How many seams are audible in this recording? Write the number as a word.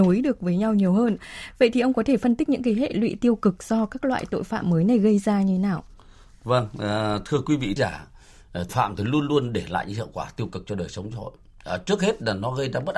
two